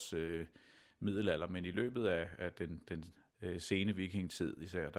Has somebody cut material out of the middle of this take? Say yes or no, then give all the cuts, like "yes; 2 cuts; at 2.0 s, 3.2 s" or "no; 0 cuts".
yes; 1 cut; at 3.3 s